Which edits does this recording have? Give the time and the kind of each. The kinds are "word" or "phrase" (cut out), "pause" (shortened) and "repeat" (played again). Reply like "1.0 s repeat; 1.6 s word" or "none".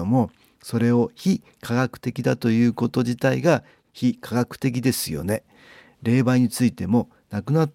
none